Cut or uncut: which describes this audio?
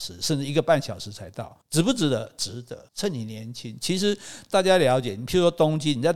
cut